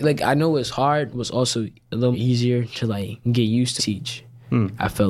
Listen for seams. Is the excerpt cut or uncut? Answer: cut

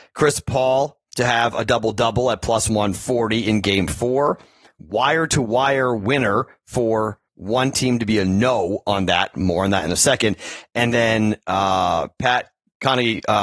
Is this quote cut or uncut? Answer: cut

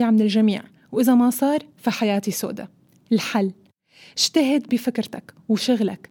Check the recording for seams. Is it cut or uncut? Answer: uncut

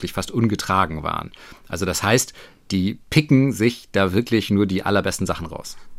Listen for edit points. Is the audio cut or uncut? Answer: uncut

